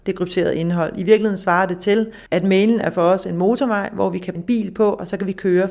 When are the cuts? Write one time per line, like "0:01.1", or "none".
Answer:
0:02.3
0:04.3